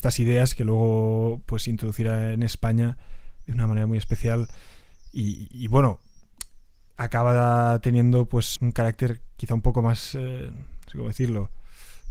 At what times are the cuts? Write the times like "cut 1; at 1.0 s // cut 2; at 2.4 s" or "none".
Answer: cut 1; at 8.6 s